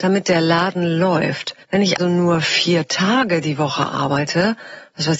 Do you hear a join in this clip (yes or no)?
yes